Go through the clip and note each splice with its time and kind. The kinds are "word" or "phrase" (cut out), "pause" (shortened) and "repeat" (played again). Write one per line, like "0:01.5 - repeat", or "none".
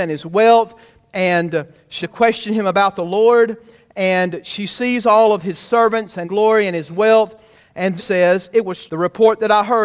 0:02.0 - word
0:06.2 - word
0:08.0 - word
0:08.9 - word